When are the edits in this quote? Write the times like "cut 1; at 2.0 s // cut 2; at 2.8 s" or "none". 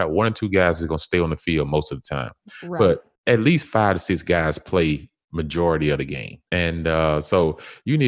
cut 1; at 3.2 s // cut 2; at 6.5 s

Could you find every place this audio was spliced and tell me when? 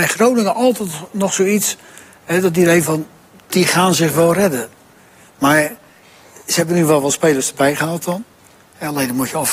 none

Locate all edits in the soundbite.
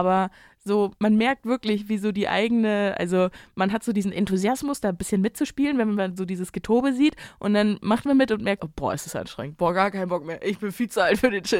cut 1; at 1.0 s // cut 2; at 8.6 s

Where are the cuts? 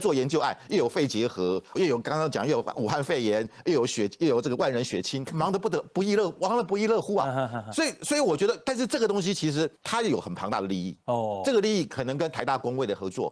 cut 1; at 1.7 s // cut 2; at 5.2 s // cut 3; at 9.8 s

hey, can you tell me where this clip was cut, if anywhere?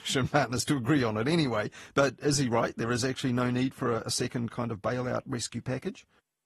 none

